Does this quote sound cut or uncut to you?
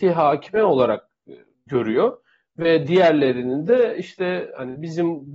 uncut